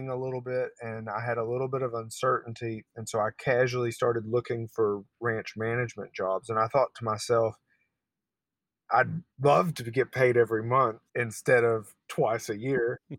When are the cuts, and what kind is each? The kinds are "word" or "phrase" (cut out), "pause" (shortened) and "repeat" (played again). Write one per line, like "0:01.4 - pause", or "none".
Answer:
0:09.3 - pause
0:11.1 - pause
0:12.0 - pause